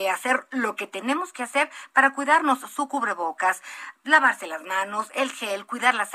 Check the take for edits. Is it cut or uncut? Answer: uncut